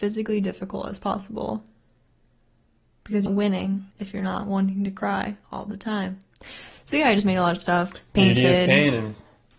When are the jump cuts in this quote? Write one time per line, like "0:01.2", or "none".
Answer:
0:03.3
0:03.9
0:05.4